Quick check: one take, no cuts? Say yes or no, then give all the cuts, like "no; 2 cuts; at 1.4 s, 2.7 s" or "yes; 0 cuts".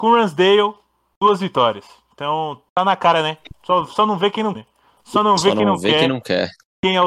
no; 2 cuts; at 2.7 s, 4.5 s